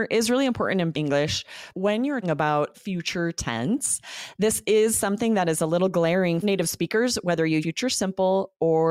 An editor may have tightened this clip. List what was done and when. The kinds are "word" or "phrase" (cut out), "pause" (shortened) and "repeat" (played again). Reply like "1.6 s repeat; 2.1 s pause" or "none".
0.9 s word; 1.7 s word; 2.2 s word; 2.7 s word; 6.4 s word; 7.6 s word